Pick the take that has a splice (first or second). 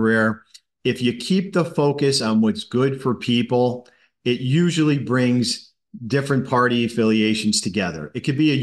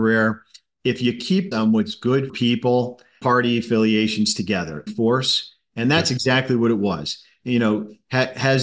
second